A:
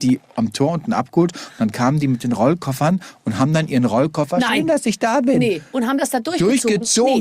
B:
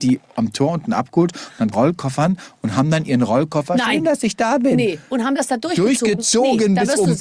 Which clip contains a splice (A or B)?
B